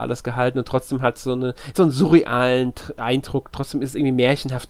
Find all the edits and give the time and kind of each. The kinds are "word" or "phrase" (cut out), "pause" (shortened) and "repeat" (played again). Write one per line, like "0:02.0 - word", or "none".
0:01.8 - phrase